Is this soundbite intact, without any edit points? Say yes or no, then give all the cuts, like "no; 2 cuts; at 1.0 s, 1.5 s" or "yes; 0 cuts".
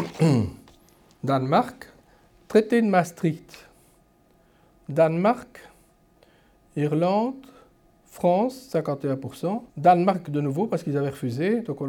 no; 1 cut; at 9.7 s